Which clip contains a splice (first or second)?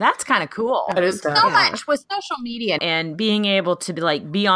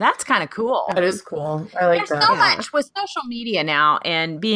first